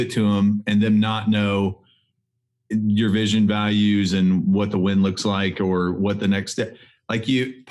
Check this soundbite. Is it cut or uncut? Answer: uncut